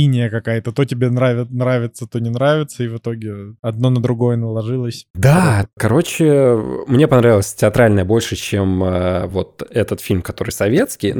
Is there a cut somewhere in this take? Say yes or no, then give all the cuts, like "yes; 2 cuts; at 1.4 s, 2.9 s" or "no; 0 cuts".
no; 0 cuts